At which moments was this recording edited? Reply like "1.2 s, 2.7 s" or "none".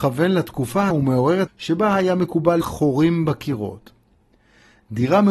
0.9 s, 1.5 s, 2.6 s

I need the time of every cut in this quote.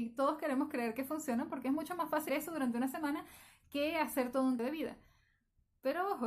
2.3 s, 4.6 s

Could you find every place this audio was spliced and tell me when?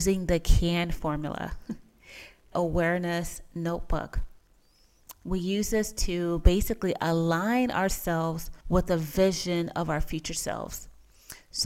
2.5 s, 8.6 s

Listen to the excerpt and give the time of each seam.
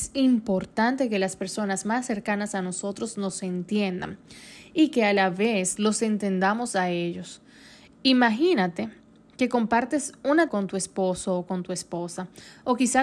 5.8 s, 10.5 s

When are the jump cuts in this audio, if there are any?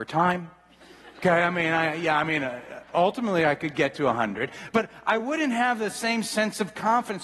none

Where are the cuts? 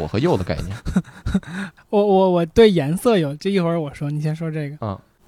1.8 s

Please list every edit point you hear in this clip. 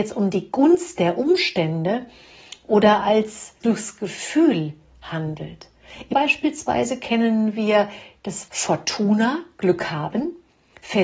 3.6 s, 6.1 s, 8.5 s

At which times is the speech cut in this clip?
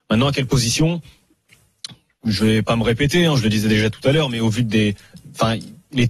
none

